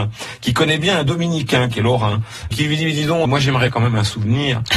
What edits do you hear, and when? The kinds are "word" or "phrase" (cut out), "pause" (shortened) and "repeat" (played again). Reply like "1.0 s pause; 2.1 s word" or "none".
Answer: 2.5 s word; 3.2 s word; 3.7 s word

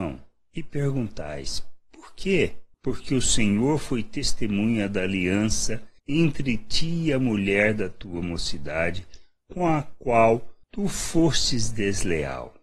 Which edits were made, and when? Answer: none

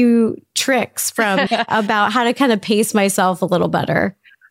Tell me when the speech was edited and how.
1.5 s word

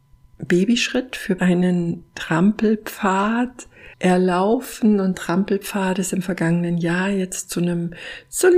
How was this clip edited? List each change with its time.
1.4 s word; 3.9 s pause; 5.1 s word

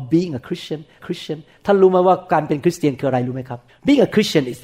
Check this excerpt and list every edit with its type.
1.0 s repeat; 3.7 s pause

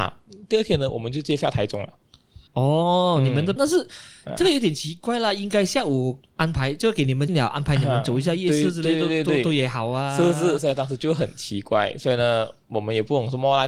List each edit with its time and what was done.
2.5 s pause; 3.6 s phrase; 7.3 s phrase

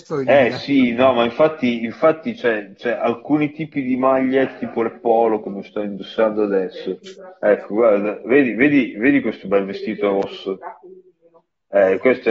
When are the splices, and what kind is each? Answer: none

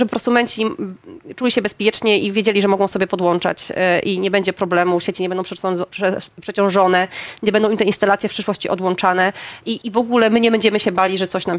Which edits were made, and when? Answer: 9.8 s word

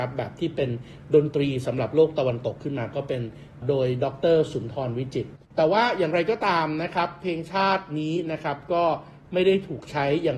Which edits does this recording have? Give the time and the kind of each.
5.4 s pause

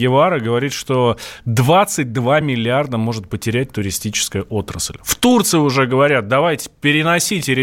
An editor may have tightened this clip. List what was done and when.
none

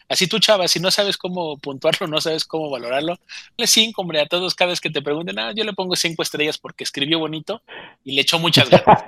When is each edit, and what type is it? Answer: 3.6 s word

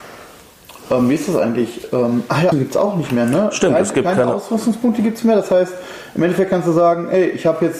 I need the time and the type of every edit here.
2.5 s word

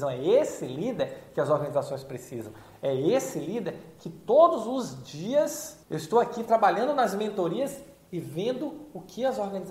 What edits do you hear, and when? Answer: 5.8 s pause

